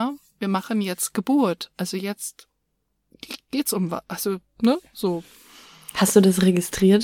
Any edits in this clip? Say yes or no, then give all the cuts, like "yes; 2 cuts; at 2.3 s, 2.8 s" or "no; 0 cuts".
no; 0 cuts